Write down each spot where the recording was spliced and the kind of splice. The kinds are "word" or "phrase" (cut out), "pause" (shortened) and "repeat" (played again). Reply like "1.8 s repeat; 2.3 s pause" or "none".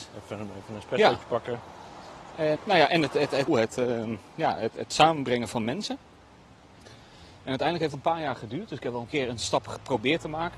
2.6 s word; 3.1 s word; 3.5 s word; 7.9 s word; 9.1 s word